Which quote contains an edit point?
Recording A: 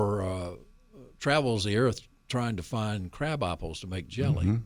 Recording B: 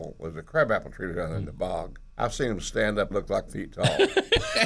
B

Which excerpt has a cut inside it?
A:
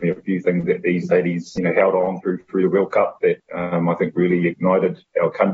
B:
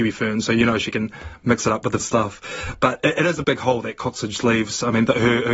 B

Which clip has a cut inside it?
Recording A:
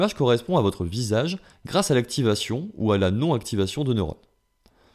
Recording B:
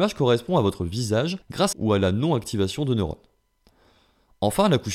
B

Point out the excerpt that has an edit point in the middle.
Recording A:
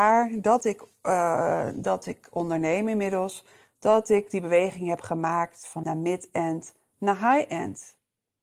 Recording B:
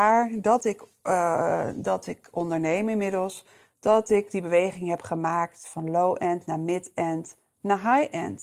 A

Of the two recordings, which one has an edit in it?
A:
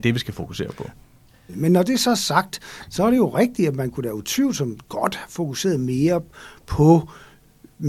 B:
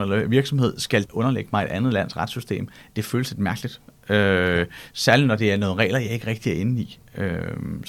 B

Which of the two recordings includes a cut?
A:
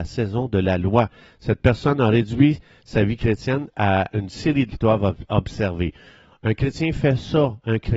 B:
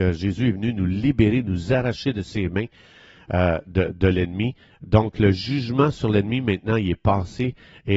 A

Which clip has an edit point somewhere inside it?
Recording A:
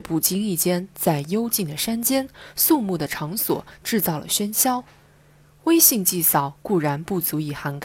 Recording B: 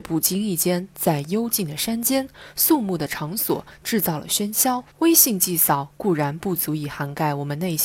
B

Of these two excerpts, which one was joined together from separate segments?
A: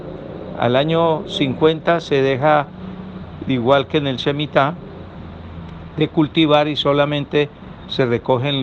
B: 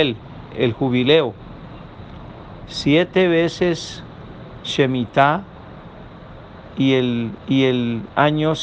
B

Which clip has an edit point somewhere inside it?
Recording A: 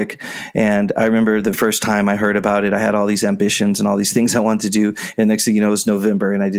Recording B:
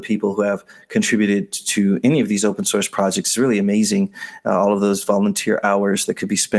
A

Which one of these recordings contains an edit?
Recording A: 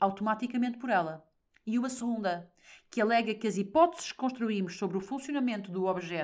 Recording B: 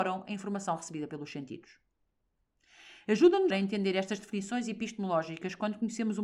B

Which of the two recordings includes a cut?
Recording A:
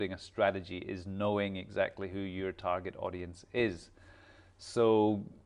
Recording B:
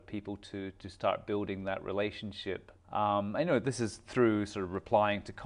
B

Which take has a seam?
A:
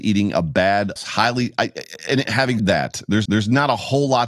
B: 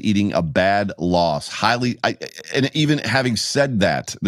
A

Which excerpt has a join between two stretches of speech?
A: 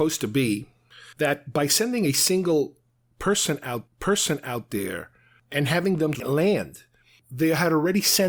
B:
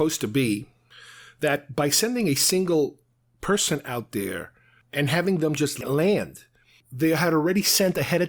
A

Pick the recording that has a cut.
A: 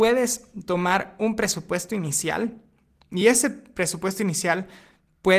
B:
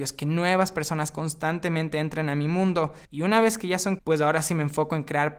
B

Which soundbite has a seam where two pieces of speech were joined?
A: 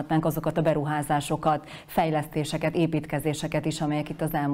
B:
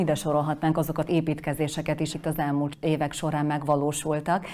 B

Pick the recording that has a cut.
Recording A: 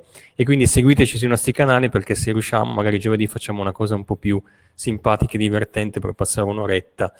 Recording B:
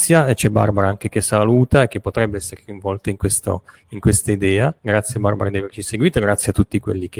B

